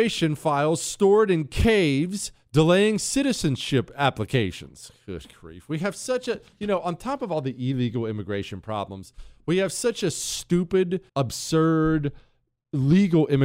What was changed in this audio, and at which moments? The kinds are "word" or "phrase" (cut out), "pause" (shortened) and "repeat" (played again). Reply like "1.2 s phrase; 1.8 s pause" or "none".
11.1 s pause